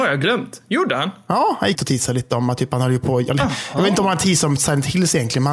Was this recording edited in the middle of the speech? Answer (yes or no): yes